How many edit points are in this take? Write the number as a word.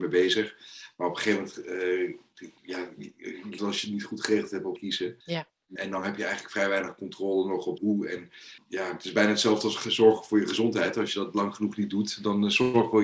seven